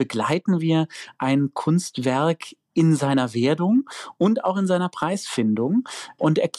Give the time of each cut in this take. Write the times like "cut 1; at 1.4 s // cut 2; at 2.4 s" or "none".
none